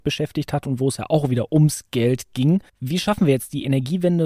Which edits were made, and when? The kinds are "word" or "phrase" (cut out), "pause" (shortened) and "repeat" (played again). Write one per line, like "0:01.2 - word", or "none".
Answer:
0:02.7 - pause